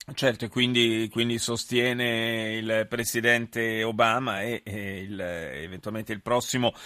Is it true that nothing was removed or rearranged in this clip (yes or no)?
yes